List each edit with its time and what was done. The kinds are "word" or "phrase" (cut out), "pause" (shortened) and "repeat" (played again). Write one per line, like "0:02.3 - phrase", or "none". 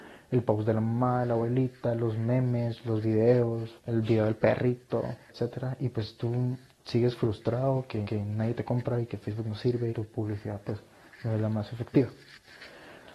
0:03.8 - pause
0:05.3 - word
0:08.0 - repeat
0:09.9 - phrase